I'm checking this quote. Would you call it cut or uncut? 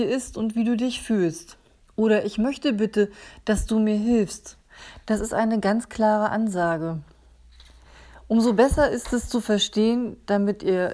uncut